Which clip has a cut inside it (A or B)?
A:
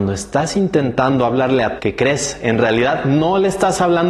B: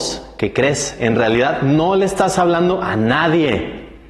A